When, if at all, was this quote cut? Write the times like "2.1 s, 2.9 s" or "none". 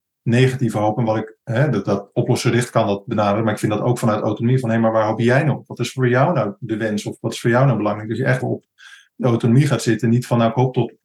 1.4 s, 8.4 s

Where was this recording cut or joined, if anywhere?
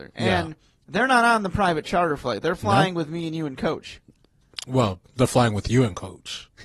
none

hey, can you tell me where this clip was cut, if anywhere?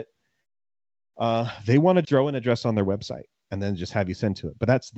2.0 s

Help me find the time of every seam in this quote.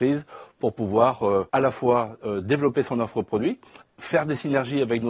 1.5 s, 3.8 s

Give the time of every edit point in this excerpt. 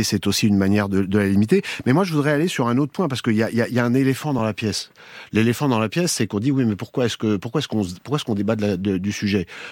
none

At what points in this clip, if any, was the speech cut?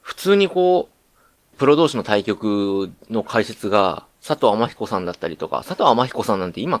1.5 s, 4.1 s

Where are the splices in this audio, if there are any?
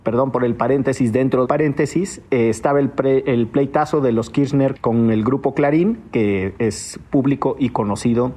1.4 s, 4.8 s

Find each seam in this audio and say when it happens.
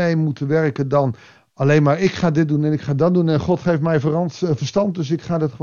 none

